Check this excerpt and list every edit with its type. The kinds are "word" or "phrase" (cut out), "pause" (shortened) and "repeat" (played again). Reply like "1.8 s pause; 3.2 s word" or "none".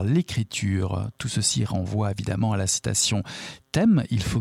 none